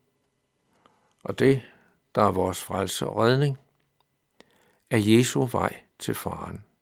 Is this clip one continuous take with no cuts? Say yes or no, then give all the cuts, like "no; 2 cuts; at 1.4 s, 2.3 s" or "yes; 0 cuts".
yes; 0 cuts